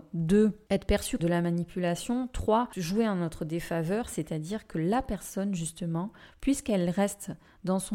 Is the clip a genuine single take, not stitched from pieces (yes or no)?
no